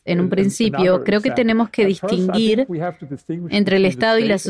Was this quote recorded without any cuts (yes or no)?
yes